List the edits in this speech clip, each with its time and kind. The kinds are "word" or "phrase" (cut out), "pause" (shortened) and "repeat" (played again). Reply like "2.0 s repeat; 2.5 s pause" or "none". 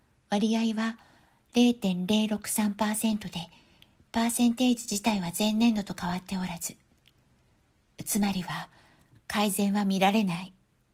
none